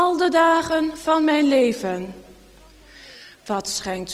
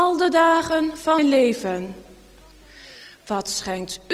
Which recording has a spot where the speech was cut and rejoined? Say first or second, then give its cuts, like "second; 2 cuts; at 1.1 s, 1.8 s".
second; 1 cut; at 1.2 s